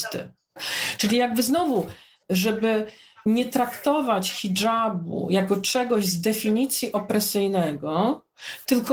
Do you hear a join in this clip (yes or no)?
no